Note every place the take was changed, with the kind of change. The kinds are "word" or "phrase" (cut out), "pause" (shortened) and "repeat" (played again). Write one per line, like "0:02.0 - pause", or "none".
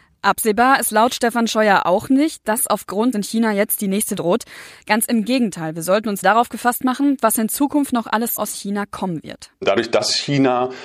0:03.1 - phrase
0:04.2 - word
0:06.2 - word
0:08.4 - word